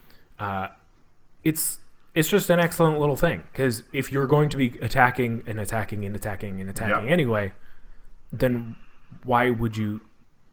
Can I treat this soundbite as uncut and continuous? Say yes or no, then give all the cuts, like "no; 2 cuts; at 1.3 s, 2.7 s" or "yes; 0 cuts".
yes; 0 cuts